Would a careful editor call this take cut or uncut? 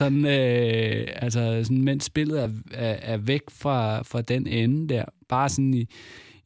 uncut